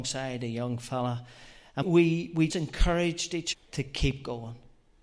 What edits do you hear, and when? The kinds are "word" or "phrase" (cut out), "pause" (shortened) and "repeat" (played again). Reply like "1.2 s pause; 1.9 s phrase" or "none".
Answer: 1.8 s word; 2.5 s word; 3.5 s word